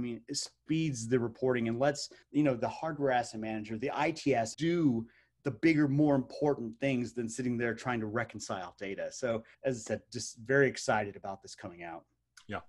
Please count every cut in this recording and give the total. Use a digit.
3